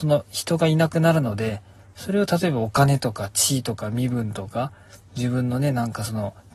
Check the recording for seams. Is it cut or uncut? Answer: uncut